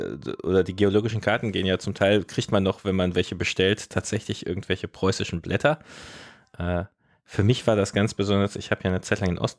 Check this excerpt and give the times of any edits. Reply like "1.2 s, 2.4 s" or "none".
none